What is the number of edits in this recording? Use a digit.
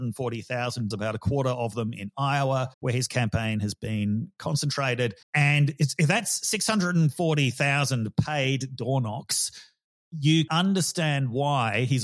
4